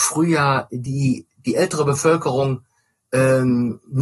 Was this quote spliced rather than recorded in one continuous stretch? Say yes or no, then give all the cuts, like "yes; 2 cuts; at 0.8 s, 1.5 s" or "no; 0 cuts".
no; 0 cuts